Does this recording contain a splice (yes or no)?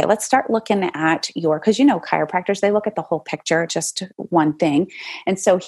yes